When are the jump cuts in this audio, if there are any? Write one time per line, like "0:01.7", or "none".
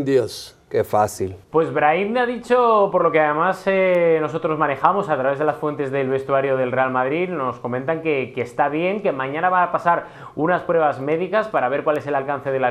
0:01.4